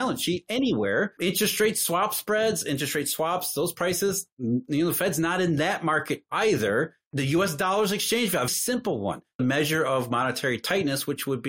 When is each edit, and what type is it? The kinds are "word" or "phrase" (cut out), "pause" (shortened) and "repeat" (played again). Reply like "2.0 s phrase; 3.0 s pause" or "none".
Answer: 8.5 s word; 9.4 s phrase